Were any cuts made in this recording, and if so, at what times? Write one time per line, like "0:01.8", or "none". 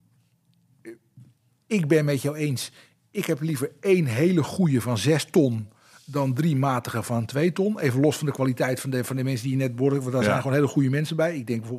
none